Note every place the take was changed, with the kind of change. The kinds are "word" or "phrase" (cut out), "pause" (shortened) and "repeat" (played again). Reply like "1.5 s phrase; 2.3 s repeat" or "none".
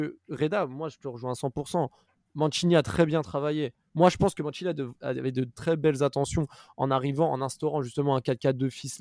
none